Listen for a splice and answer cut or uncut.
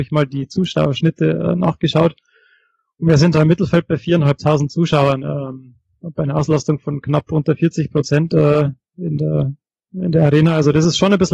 uncut